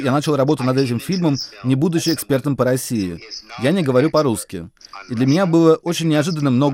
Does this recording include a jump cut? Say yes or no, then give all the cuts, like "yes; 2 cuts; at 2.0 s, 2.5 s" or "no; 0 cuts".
no; 0 cuts